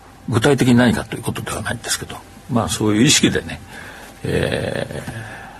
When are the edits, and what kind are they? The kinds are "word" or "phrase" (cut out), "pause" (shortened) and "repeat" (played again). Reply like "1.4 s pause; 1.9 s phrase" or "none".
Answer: none